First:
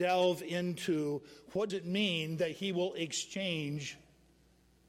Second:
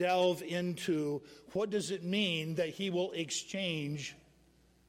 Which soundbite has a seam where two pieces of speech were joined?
first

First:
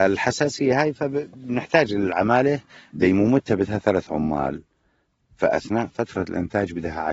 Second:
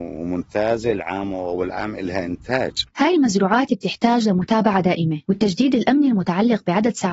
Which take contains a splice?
second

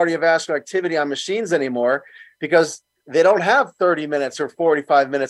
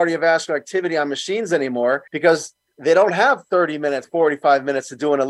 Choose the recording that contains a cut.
second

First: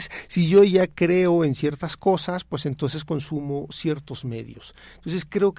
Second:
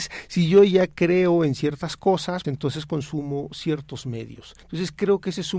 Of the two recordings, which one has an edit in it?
second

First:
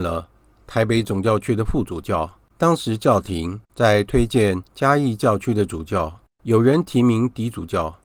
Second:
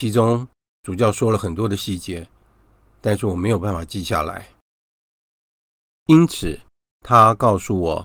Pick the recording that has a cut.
first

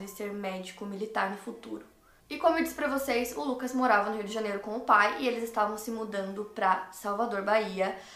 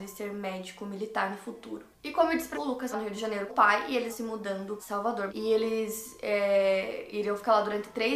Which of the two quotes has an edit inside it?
second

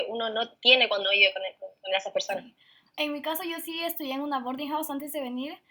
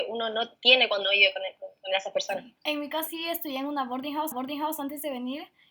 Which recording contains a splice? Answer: second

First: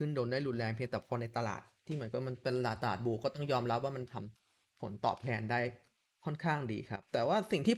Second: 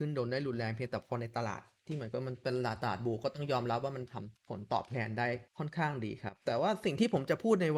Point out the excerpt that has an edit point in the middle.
second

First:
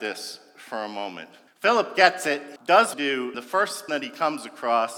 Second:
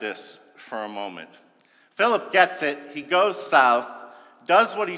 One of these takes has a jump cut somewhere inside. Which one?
first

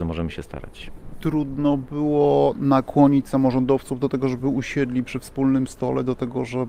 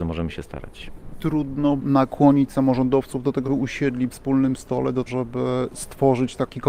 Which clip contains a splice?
second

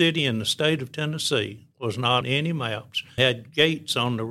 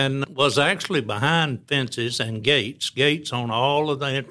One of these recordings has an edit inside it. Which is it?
first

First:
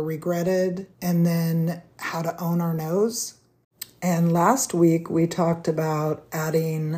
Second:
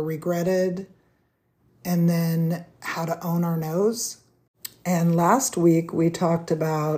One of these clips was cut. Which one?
first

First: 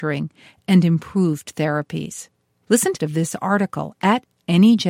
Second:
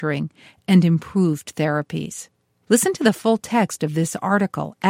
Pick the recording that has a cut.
first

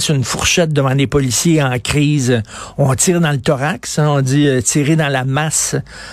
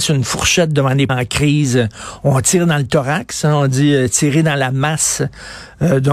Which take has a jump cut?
second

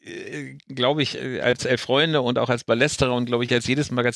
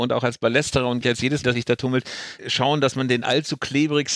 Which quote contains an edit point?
second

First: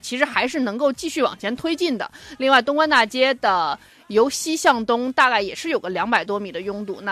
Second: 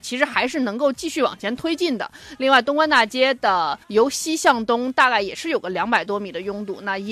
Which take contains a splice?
second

